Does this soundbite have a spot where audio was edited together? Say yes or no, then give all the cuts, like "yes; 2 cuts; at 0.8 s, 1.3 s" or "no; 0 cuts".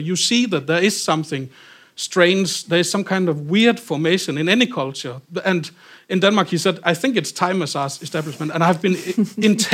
no; 0 cuts